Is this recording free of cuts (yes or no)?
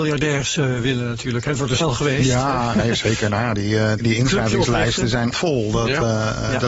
no